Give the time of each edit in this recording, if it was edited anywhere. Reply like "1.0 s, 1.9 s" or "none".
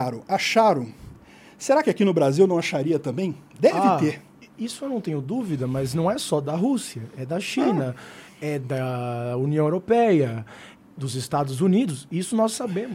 none